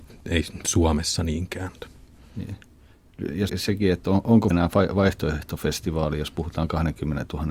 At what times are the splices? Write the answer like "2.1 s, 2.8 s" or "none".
3.5 s, 4.5 s

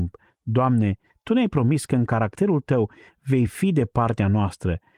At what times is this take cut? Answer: none

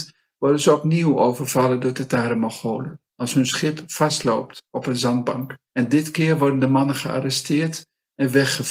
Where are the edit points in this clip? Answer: 3.1 s, 4.7 s, 5.7 s

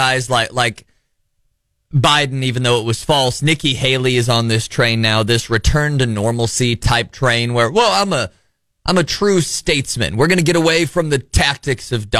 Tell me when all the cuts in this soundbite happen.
none

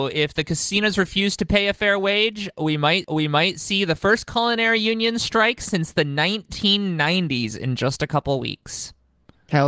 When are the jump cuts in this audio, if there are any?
3.0 s

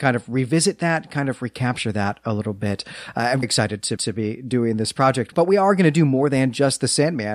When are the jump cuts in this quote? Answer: 3.4 s, 4.0 s, 5.3 s

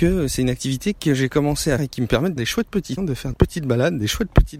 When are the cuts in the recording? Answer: 1.8 s, 2.4 s, 3.0 s, 3.3 s

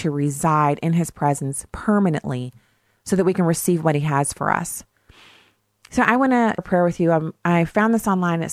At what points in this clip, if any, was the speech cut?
6.6 s

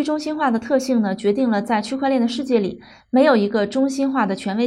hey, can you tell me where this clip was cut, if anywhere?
none

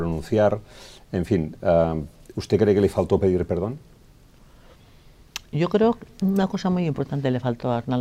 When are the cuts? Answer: none

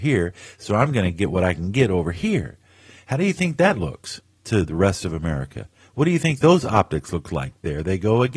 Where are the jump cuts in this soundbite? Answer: none

